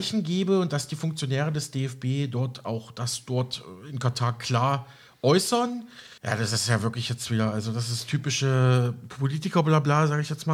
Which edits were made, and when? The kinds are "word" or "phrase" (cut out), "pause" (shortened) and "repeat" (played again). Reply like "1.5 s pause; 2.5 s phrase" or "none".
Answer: 6.2 s pause